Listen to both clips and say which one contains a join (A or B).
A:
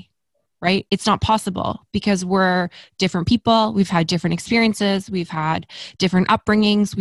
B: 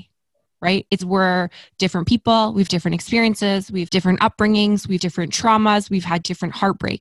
B